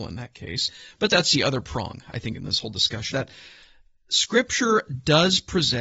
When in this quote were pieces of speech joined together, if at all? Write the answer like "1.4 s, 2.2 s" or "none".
3.1 s